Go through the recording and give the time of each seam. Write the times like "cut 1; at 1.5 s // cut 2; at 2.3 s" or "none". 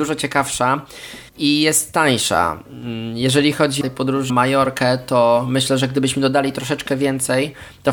cut 1; at 1.3 s // cut 2; at 3.8 s // cut 3; at 4.3 s